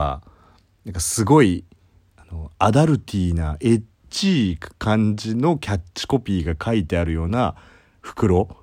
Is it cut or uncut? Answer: uncut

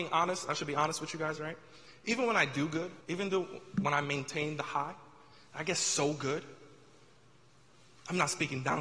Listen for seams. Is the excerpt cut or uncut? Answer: cut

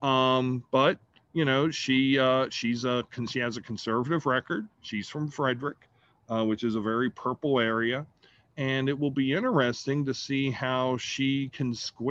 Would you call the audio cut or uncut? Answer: uncut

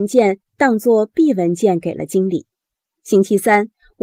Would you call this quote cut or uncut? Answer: uncut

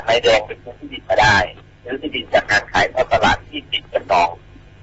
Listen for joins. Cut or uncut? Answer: uncut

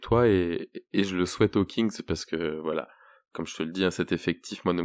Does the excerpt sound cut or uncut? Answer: uncut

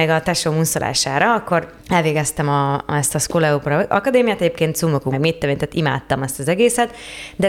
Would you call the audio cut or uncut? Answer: cut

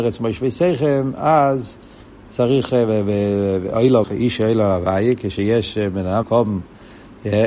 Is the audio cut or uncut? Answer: cut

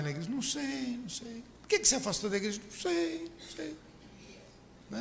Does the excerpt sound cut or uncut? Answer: cut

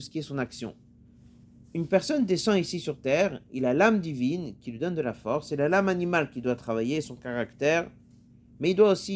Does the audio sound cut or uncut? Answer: uncut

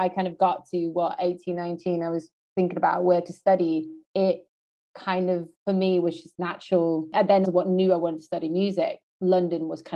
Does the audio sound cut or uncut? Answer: cut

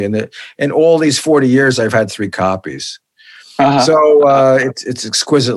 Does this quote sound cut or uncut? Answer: uncut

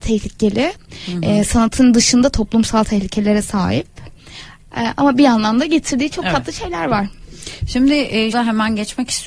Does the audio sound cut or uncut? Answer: cut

